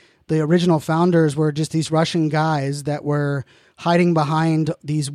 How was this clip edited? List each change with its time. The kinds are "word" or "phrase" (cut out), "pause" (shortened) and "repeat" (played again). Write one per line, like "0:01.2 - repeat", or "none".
none